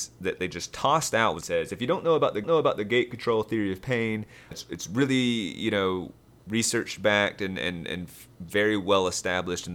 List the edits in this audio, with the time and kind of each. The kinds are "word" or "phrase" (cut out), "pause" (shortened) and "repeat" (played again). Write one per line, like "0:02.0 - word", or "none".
0:01.4 - phrase
0:02.4 - repeat
0:04.5 - word